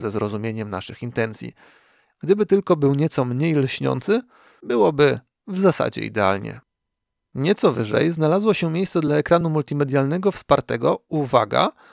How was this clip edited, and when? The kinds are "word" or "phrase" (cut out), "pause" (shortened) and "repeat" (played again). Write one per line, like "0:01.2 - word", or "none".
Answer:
none

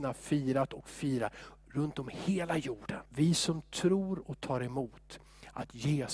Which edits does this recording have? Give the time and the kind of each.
0:03.1 - pause

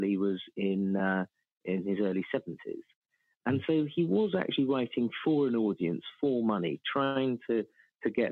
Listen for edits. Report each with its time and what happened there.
none

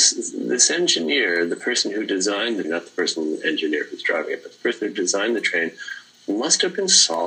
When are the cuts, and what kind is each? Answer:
0:02.6 - word

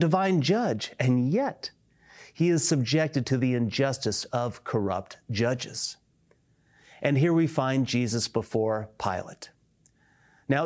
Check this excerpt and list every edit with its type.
none

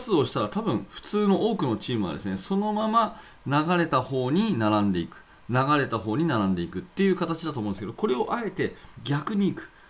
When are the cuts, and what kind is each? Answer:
0:08.9 - pause

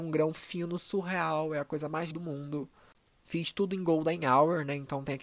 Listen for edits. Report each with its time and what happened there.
0:02.1 - word

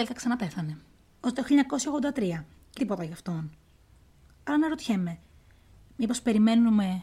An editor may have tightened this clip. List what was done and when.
0:01.3 - phrase
0:02.8 - phrase

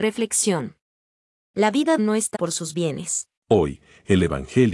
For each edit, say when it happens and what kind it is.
0:02.0 - phrase
0:02.3 - word
0:03.4 - pause

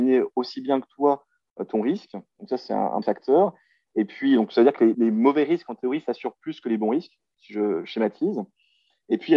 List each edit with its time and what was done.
0:03.0 - word
0:04.9 - word

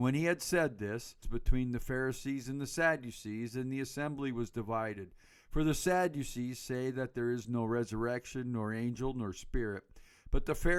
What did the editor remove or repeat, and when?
0:01.2 - phrase

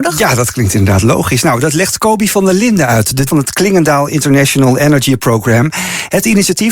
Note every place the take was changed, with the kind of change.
0:03.3 - word

